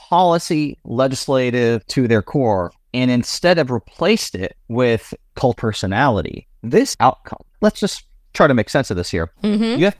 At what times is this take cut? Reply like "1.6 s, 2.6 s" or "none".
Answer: 1.8 s, 4.6 s, 5.6 s, 6.9 s